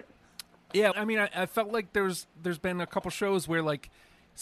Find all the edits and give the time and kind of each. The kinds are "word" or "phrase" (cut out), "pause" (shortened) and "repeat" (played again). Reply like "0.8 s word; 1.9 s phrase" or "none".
0.9 s word; 2.3 s pause